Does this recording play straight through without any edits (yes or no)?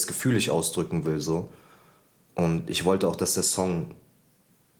yes